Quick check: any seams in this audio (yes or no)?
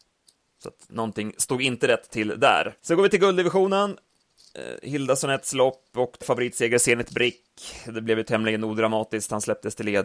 yes